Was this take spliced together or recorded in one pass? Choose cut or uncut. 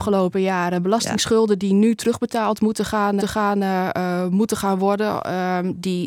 cut